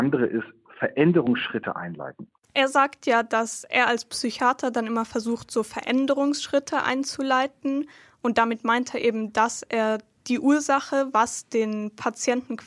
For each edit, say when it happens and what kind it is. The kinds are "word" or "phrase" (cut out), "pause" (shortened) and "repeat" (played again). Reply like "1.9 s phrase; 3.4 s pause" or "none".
none